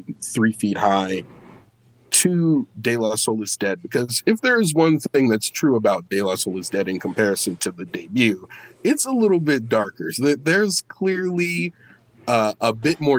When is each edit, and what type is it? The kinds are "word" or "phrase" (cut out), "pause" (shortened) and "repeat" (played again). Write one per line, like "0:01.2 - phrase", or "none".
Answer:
none